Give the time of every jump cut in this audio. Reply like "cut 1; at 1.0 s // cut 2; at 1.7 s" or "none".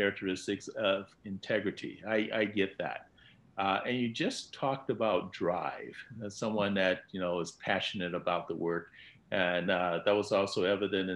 none